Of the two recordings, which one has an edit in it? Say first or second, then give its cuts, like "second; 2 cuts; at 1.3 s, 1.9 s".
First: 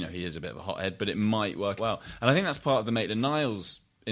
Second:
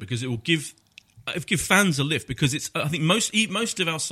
first; 1 cut; at 1.8 s